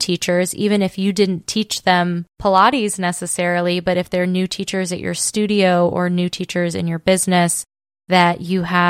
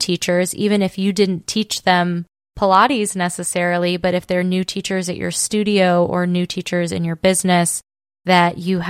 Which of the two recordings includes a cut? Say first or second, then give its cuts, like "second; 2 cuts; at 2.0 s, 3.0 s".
first; 1 cut; at 2.3 s